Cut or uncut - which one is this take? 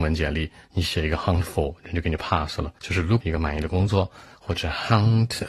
cut